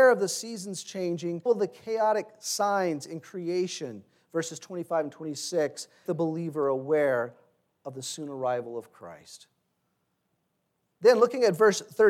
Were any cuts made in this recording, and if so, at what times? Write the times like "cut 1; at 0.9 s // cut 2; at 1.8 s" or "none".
cut 1; at 1.5 s // cut 2; at 6.1 s